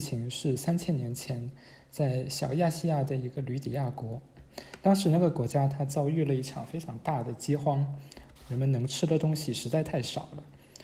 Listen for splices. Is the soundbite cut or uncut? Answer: cut